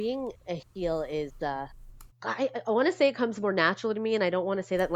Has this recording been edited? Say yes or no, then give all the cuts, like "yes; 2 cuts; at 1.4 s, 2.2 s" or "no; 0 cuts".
yes; 1 cut; at 2.1 s